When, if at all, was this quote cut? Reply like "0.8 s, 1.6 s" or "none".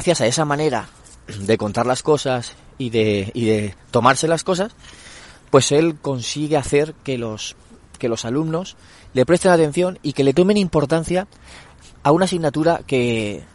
none